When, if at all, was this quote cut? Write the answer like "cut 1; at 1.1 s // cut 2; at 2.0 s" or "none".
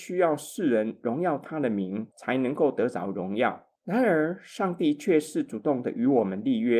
cut 1; at 3.8 s